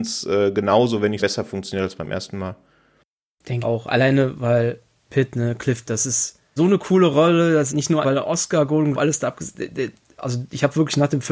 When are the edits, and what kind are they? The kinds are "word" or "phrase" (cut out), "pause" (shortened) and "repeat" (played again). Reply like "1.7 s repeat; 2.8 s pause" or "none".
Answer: 1.2 s word; 3.6 s word; 5.1 s word; 5.9 s word; 6.6 s word; 7.7 s word; 8.0 s word; 8.9 s word